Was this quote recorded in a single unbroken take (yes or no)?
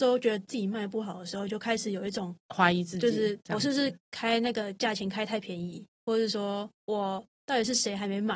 no